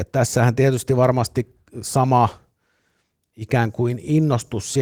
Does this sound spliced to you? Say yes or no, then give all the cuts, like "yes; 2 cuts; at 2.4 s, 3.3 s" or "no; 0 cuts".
no; 0 cuts